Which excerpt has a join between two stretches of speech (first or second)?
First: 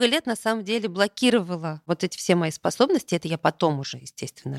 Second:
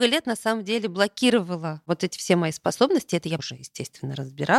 second